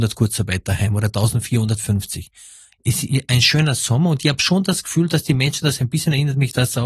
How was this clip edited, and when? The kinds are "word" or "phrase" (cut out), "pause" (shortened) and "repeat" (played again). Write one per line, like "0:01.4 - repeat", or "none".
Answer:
none